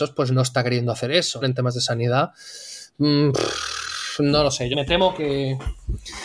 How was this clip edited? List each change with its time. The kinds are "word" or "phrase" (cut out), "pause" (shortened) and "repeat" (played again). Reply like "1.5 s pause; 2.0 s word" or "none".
1.4 s phrase; 4.7 s word